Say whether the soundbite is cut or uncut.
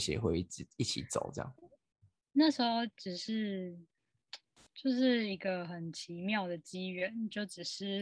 uncut